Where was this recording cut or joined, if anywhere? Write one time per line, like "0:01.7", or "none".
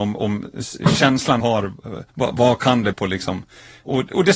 0:01.4
0:02.1
0:02.9

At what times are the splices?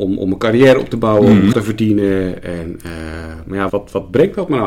0:01.5
0:03.7

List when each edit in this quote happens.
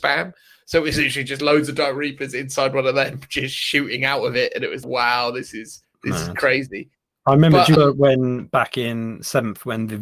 0:04.8
0:05.8
0:07.7

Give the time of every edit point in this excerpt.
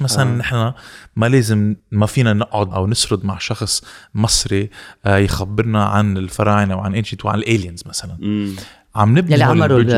0:01.8
0:02.7
0:07.2

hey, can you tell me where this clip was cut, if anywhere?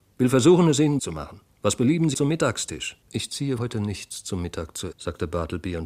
0:01.0
0:01.5
0:02.1
0:03.0
0:03.6
0:04.9

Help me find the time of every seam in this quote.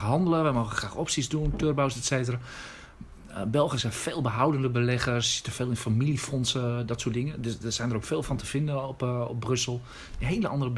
none

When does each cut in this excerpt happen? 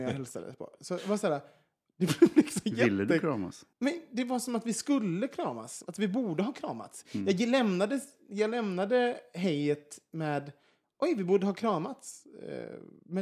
0:03.7

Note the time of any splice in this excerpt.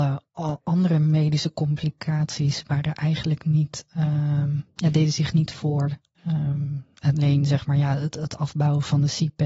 0:06.1

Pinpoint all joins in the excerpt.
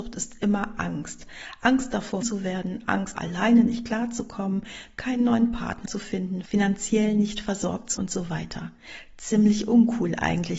0:02.2
0:03.2
0:05.9
0:08.0

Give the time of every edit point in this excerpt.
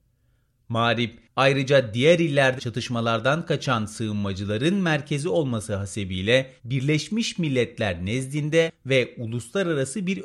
0:02.6
0:06.6

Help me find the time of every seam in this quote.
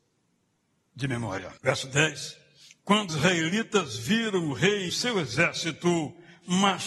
0:01.6
0:03.1
0:04.9

